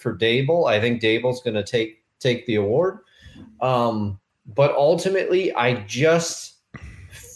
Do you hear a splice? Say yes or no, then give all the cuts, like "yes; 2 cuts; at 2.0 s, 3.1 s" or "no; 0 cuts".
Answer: yes; 1 cut; at 4.3 s